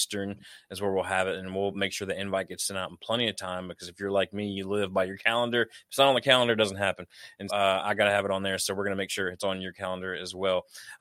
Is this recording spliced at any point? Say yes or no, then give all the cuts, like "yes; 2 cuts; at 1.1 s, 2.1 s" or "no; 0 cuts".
yes; 1 cut; at 7.5 s